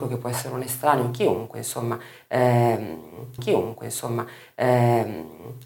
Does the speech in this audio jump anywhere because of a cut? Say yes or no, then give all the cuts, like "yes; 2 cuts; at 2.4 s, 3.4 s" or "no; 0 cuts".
yes; 1 cut; at 3.4 s